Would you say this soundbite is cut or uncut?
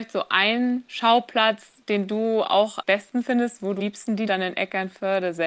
cut